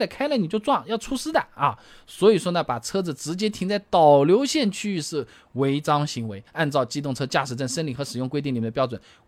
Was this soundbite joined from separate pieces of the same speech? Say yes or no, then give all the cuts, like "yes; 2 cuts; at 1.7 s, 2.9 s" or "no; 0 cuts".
yes; 1 cut; at 6.5 s